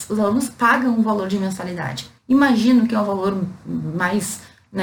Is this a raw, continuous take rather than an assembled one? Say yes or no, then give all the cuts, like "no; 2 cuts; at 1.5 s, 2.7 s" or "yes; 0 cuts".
no; 1 cut; at 2.2 s